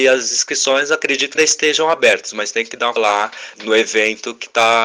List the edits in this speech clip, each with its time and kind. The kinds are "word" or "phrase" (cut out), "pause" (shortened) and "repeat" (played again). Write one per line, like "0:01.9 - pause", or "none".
0:01.4 - word
0:03.0 - word
0:03.5 - word